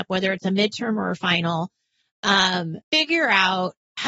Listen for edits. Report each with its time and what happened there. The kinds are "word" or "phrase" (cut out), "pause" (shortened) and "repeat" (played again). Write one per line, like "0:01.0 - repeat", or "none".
0:02.8 - pause